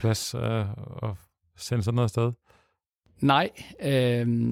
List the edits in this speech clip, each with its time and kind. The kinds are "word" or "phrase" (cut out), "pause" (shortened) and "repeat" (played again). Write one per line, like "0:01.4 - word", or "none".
none